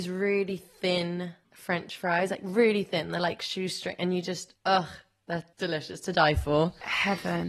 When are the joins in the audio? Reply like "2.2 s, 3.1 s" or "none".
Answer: 5.5 s